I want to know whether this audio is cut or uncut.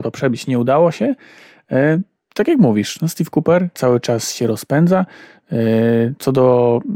cut